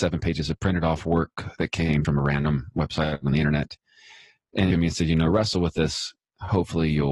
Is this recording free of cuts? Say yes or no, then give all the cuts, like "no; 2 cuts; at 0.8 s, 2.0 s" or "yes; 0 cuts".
no; 3 cuts; at 1.6 s, 2.0 s, 4.7 s